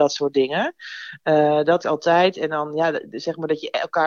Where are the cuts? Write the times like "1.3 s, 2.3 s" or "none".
1.8 s